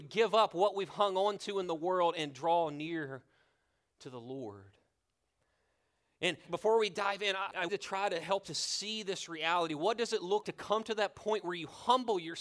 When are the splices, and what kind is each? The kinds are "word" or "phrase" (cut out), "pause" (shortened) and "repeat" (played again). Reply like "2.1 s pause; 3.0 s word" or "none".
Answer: 7.7 s word; 8.4 s word; 10.4 s word